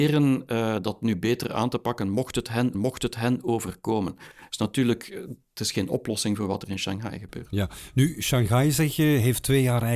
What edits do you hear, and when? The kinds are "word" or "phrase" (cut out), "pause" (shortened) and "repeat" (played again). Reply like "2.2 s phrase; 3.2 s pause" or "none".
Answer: 2.7 s repeat